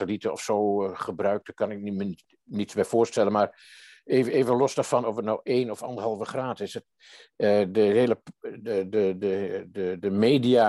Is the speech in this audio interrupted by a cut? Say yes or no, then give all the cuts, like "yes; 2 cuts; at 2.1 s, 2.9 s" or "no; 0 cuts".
no; 0 cuts